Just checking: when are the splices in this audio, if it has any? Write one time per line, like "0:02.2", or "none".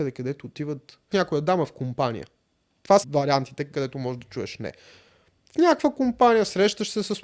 0:01.1
0:03.0
0:03.7